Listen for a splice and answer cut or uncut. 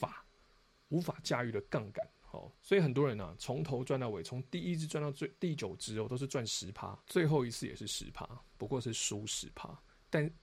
cut